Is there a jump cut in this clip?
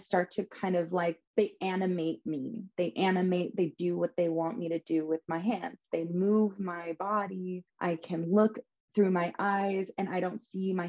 yes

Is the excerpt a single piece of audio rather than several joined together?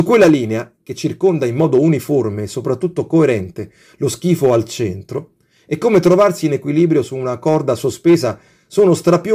yes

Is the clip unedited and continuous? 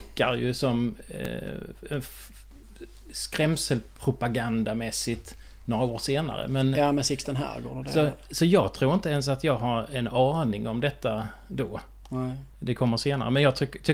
yes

